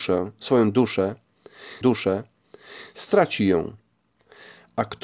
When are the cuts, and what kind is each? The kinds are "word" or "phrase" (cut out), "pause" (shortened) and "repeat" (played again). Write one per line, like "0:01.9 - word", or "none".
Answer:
0:01.8 - repeat